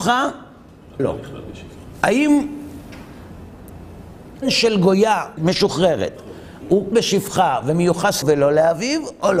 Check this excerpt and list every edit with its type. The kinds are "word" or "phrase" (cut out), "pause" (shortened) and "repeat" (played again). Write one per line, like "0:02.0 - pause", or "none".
0:01.0 - word
0:04.4 - word
0:05.4 - word
0:06.6 - word
0:06.9 - word
0:08.2 - word